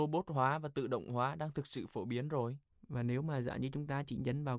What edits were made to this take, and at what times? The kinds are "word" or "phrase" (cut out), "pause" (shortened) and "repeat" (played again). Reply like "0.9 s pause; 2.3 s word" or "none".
2.7 s pause

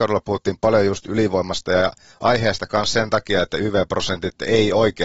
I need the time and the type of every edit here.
none

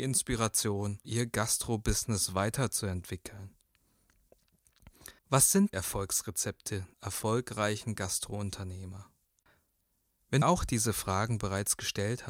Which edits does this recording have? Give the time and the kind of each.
1.0 s word; 5.2 s pause; 5.7 s word; 6.9 s word; 10.4 s phrase

